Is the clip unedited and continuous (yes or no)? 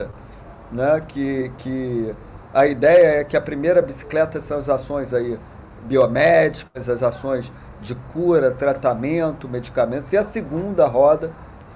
yes